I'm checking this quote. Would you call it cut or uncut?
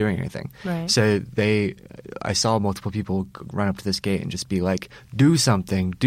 uncut